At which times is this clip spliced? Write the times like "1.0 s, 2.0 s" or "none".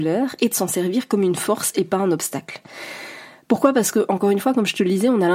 none